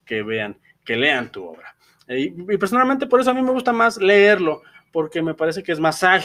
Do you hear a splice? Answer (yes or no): no